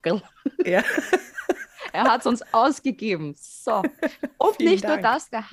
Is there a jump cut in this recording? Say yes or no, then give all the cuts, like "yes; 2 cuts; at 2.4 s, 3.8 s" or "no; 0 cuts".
no; 0 cuts